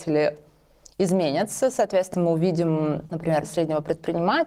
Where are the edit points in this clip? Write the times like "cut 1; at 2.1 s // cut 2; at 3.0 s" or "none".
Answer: cut 1; at 2.1 s // cut 2; at 3.1 s // cut 3; at 3.4 s